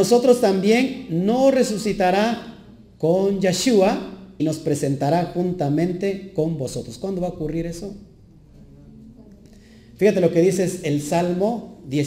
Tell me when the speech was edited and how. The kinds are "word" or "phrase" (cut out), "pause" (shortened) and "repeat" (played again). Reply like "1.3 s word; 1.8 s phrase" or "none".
4.4 s word